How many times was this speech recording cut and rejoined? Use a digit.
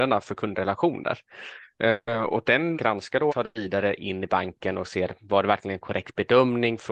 3